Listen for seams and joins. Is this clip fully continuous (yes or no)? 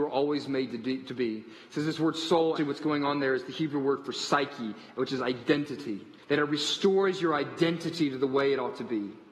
no